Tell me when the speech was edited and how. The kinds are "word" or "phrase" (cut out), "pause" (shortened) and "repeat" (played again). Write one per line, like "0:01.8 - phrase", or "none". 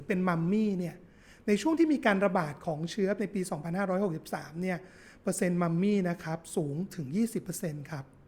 0:03.2 - word